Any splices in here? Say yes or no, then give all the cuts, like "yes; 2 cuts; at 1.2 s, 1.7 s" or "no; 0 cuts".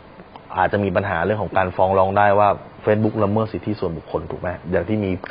no; 0 cuts